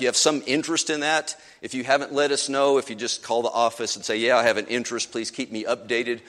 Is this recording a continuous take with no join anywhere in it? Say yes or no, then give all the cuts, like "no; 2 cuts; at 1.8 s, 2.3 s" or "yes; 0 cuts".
yes; 0 cuts